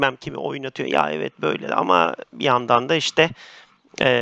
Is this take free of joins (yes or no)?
yes